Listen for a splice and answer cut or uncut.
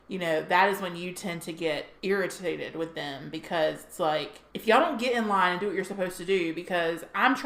cut